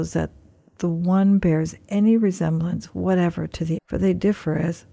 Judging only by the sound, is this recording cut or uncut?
cut